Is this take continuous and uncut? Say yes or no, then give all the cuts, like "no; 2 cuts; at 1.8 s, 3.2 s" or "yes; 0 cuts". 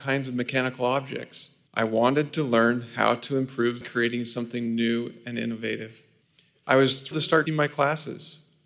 no; 5 cuts; at 1.7 s, 3.8 s, 6.2 s, 7.1 s, 7.5 s